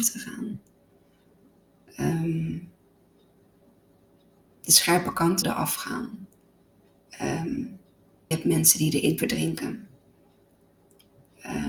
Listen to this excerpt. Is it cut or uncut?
cut